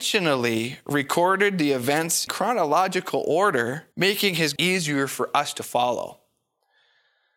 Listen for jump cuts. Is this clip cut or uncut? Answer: cut